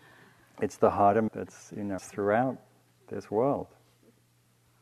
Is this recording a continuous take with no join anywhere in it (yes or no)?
no